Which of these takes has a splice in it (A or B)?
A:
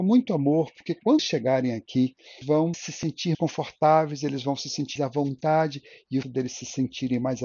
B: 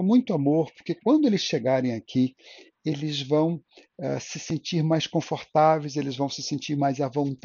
A